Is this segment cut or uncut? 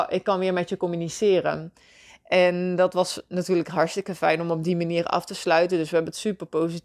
uncut